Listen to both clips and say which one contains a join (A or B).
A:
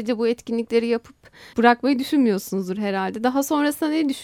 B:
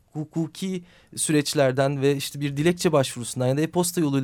A